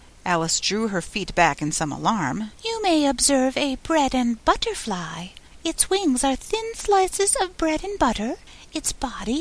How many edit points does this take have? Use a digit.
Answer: 1